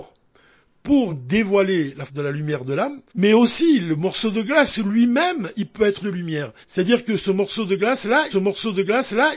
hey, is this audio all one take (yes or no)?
no